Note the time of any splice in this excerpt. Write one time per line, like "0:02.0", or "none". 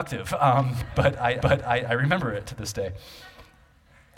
0:01.4